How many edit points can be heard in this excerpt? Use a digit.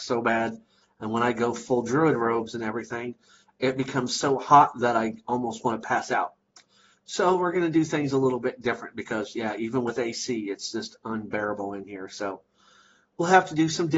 0